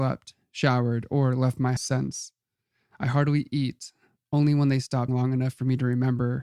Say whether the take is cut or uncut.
cut